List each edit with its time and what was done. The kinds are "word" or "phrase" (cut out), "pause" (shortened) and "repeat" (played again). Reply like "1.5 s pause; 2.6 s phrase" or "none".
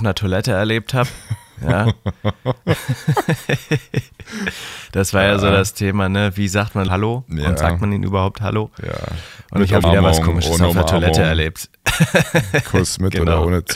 6.9 s phrase; 9.8 s word